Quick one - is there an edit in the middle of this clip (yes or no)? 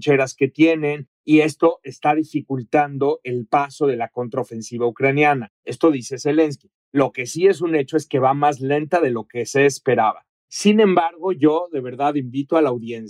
yes